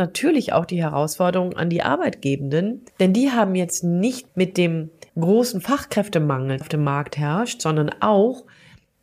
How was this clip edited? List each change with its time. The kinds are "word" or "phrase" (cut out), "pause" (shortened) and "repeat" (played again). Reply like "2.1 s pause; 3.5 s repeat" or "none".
2.9 s pause; 4.3 s word; 5.1 s pause; 6.6 s phrase